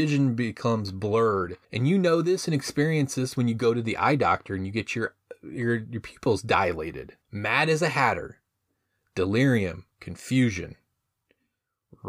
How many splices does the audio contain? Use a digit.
3